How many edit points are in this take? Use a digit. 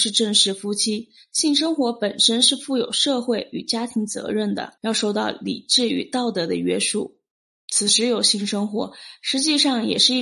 1